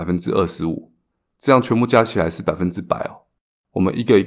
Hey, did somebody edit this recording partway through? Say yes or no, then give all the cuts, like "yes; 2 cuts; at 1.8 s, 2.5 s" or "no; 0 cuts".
no; 0 cuts